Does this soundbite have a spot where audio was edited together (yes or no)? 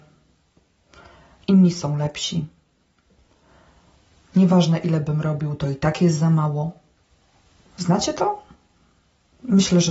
no